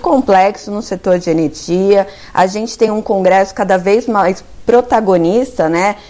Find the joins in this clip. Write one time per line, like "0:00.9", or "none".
none